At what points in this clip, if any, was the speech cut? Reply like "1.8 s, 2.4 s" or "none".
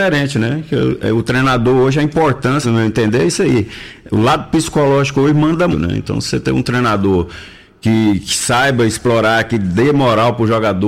2.6 s, 5.7 s

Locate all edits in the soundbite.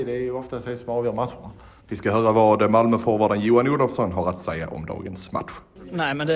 1.8 s

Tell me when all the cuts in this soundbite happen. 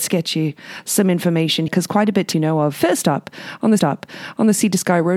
1.7 s, 2.3 s, 3.8 s

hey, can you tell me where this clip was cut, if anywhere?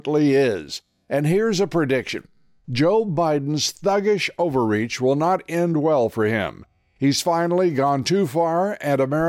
none

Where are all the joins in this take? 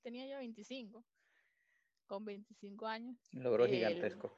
3.2 s

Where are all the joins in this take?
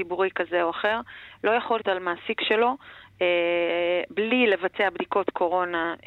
1.8 s

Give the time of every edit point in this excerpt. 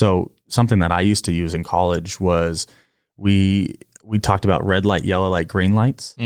none

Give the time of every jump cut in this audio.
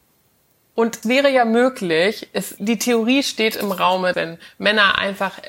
1.0 s, 2.6 s, 4.1 s

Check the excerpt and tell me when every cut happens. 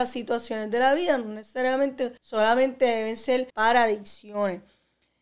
2.2 s, 3.5 s

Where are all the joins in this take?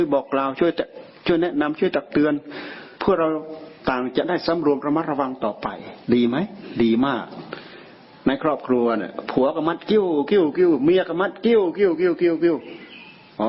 2.9 s, 6.0 s

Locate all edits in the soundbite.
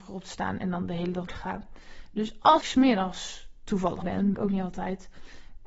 1.3 s, 2.6 s, 4.0 s, 4.3 s

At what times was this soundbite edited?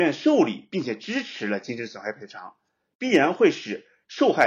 none

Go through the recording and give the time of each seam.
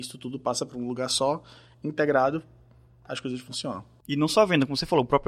none

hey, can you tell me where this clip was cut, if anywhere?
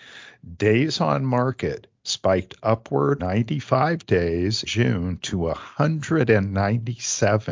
3.2 s, 4.7 s

